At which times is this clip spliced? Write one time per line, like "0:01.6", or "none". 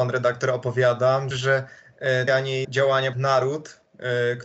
0:01.3
0:02.3
0:02.6
0:03.1